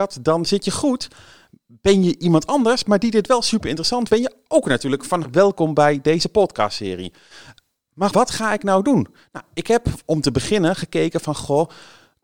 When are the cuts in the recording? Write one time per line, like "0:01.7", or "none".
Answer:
0:04.1
0:05.2
0:08.1